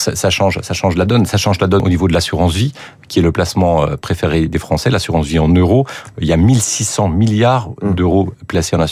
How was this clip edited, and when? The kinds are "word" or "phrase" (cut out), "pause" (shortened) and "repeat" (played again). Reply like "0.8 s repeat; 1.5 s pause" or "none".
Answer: none

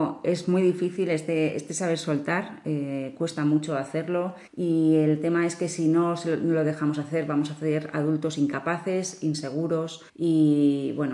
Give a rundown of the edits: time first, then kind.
4.5 s pause; 10.1 s pause

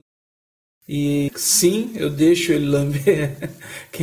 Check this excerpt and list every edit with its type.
1.3 s phrase

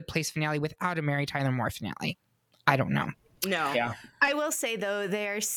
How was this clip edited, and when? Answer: none

